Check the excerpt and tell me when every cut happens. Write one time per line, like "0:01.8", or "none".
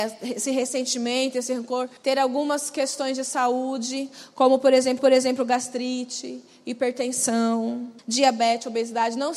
0:02.0
0:05.0
0:08.0